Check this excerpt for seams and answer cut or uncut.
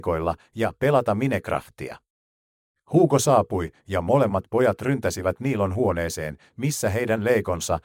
cut